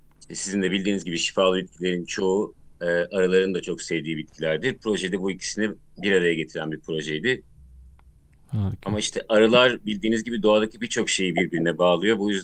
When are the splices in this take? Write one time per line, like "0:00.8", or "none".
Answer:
none